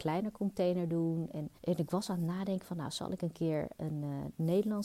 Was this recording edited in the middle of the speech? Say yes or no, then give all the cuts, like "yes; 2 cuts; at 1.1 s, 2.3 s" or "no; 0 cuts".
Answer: yes; 1 cut; at 1.6 s